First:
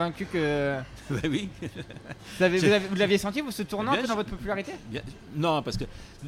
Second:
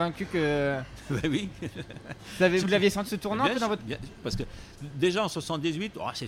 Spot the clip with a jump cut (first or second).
second